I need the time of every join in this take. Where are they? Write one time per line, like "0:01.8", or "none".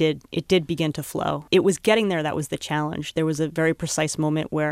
none